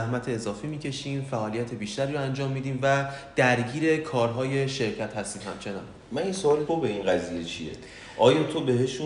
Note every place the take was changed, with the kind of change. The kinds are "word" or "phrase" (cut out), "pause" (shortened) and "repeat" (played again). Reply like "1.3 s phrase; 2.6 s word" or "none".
6.7 s phrase